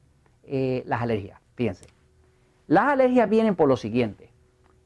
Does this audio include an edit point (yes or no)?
no